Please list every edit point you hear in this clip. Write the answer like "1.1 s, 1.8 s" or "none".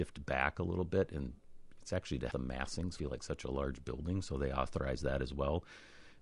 2.3 s, 3.0 s